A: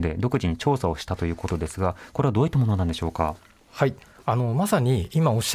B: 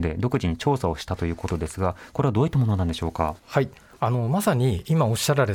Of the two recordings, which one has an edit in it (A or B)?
B